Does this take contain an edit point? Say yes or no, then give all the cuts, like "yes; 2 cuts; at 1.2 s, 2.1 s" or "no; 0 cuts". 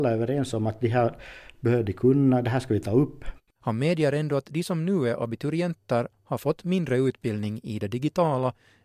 no; 0 cuts